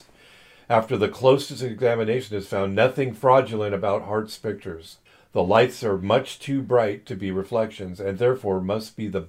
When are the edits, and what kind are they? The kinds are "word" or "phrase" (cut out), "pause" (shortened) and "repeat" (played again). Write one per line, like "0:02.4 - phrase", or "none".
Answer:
0:05.1 - pause